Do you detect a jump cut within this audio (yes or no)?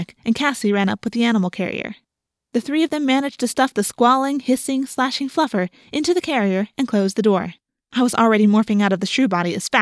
yes